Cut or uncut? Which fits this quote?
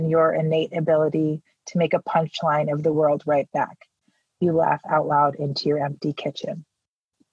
uncut